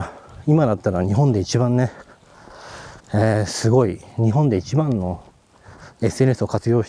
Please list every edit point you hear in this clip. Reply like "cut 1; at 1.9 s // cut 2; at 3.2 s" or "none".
cut 1; at 3.0 s